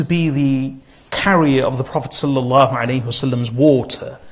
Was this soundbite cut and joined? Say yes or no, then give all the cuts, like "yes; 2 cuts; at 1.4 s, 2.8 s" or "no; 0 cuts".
no; 0 cuts